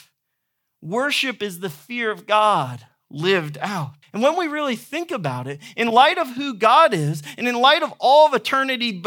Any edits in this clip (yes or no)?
yes